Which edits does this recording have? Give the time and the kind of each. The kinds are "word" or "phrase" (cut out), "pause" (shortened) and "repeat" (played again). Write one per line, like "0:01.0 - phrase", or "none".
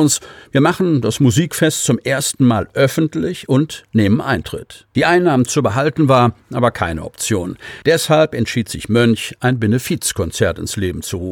none